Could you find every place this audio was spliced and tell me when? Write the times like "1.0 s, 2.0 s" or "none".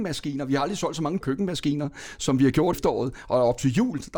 1.2 s, 2.7 s